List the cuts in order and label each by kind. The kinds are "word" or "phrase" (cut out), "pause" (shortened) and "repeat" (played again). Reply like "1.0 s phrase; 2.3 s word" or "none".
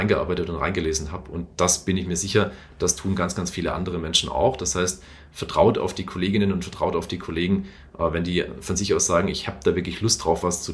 none

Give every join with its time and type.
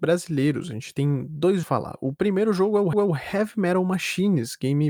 1.6 s phrase; 2.9 s repeat

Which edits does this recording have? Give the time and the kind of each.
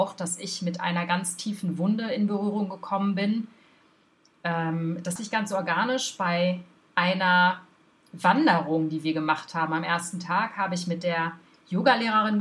5.2 s word

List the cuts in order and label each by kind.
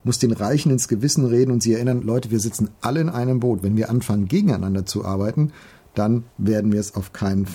none

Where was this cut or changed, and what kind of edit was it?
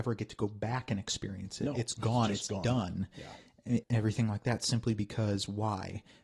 3.8 s word

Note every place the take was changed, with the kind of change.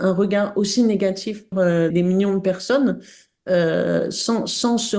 1.5 s word; 1.9 s word

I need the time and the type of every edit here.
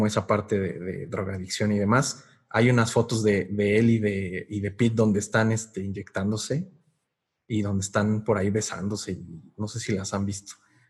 none

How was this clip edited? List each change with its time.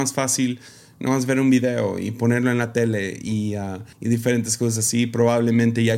3.9 s pause

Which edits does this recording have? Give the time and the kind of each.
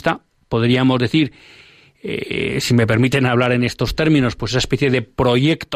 none

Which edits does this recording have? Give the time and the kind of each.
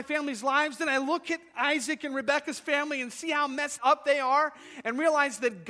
3.8 s word

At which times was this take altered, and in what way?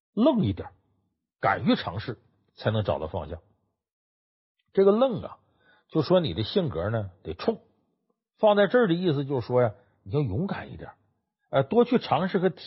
none

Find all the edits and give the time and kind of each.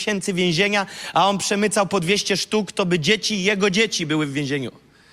none

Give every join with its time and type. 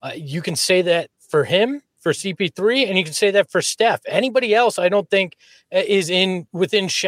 none

